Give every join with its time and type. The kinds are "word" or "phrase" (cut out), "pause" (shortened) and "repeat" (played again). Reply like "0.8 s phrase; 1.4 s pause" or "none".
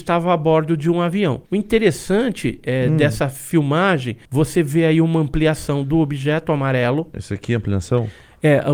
1.5 s pause; 4.2 s pause